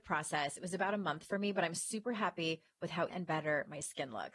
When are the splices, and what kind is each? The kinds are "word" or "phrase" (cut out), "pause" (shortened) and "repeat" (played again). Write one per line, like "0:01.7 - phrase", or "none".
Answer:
0:03.1 - word